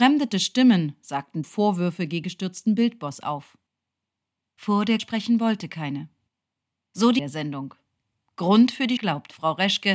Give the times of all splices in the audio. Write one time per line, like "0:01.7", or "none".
0:01.4
0:02.2
0:05.0
0:07.2
0:09.0